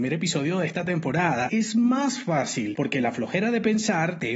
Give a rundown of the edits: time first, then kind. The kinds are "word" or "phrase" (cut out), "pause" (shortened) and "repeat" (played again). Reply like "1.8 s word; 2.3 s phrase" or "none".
1.5 s phrase